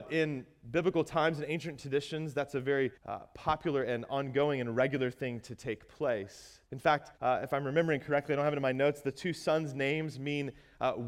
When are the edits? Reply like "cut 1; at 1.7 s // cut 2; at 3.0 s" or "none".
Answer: cut 1; at 3.0 s // cut 2; at 6.7 s // cut 3; at 7.2 s